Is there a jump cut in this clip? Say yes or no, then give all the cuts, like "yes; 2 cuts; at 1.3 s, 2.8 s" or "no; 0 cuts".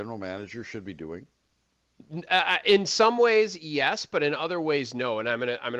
no; 0 cuts